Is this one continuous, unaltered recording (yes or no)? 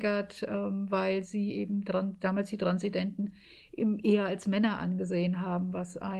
yes